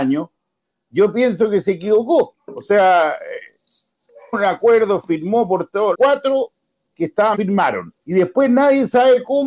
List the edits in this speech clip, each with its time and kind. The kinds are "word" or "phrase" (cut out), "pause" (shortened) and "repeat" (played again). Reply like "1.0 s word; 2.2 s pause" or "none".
2.4 s pause; 4.3 s word; 5.9 s word; 6.9 s word; 7.3 s word; 8.0 s pause

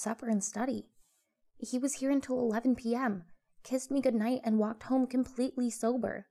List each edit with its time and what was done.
none

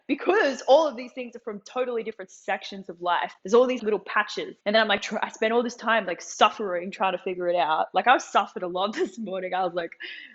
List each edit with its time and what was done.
3.4 s pause; 3.8 s word; 4.6 s pause

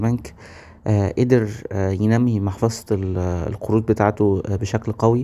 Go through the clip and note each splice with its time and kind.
none

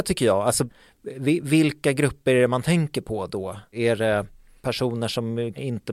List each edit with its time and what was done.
none

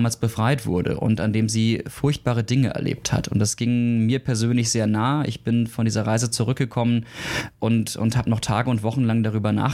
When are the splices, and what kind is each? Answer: none

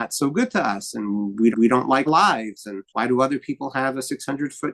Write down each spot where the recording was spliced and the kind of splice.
1.5 s repeat; 2.1 s word; 2.9 s pause

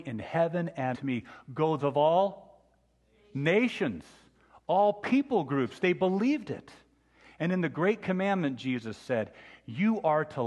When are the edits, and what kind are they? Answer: 0.9 s phrase; 1.8 s phrase

